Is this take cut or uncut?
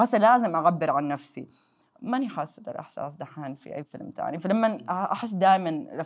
uncut